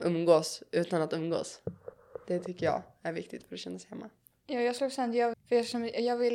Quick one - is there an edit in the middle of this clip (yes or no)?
yes